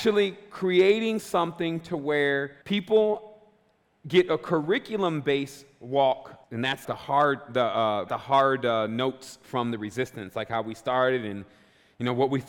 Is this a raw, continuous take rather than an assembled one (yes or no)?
no